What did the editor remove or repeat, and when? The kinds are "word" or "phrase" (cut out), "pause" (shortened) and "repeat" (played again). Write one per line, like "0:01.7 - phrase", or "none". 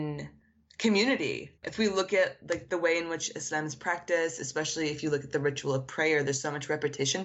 0:01.6 - pause